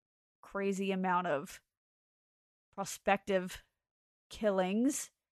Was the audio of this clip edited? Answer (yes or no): no